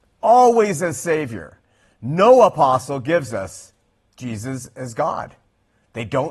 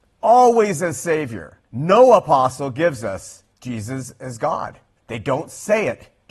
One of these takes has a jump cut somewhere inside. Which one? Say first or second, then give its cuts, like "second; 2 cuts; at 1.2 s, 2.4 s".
second; 3 cuts; at 1.6 s, 3.5 s, 4.9 s